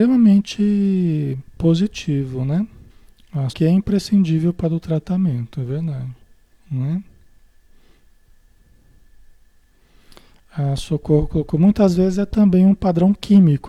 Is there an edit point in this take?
yes; 3 cuts; at 2.9 s, 3.5 s, 6.5 s

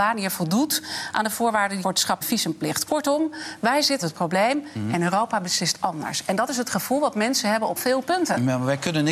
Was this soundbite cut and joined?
yes; 4 cuts; at 1.8 s, 2.2 s, 4.0 s, 7.8 s

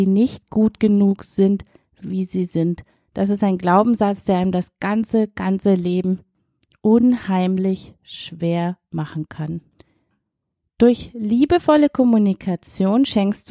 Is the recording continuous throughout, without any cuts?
yes; 0 cuts

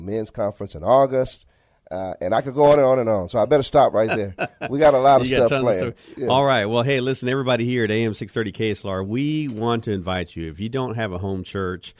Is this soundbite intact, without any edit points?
yes; 0 cuts

